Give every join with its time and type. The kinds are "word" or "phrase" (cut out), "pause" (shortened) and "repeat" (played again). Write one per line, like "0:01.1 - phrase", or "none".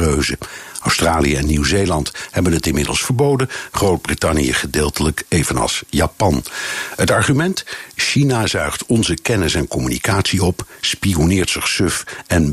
none